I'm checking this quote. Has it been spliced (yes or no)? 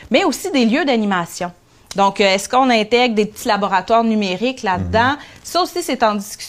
no